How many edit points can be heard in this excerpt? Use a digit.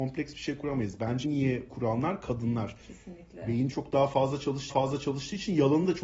4